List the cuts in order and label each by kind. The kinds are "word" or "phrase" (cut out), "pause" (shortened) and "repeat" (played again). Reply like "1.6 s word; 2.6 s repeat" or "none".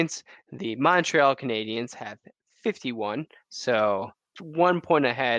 4.4 s word